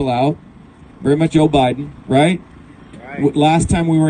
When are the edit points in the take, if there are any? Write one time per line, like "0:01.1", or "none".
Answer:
0:01.3